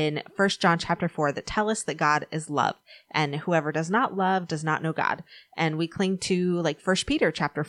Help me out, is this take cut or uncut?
uncut